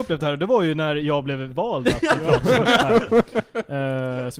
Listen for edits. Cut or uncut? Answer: uncut